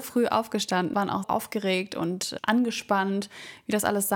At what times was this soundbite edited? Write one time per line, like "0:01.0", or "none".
0:00.9
0:01.2
0:02.4